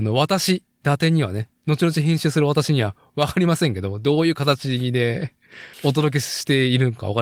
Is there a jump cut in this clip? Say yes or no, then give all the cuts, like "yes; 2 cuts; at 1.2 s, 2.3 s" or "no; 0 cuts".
yes; 2 cuts; at 1.6 s, 5.7 s